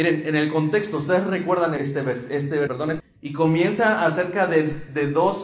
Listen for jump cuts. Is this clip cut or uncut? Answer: cut